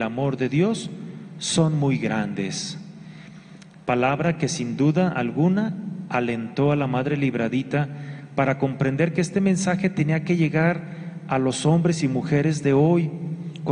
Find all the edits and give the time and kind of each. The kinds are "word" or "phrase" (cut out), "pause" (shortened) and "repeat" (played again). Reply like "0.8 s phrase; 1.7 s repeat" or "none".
none